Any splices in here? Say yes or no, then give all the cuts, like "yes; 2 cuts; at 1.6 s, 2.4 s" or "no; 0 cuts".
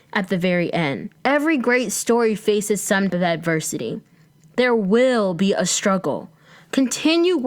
yes; 3 cuts; at 1.2 s, 3.1 s, 4.3 s